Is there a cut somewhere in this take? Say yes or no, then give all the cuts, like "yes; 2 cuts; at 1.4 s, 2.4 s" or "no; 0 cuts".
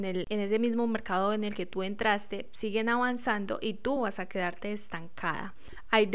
no; 0 cuts